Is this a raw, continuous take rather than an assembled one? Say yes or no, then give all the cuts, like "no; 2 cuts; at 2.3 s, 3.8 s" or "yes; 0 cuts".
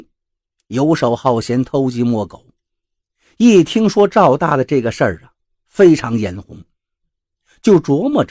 yes; 0 cuts